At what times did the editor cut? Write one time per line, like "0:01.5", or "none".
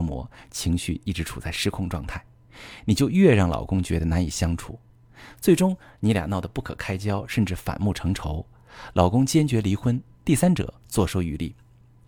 none

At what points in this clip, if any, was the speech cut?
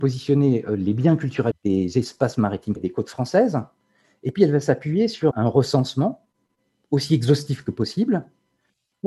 0:01.5
0:02.8
0:05.3

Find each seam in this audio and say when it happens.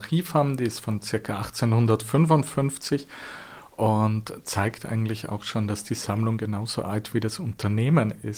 none

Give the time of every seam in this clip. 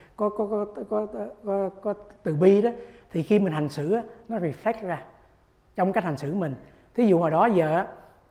none

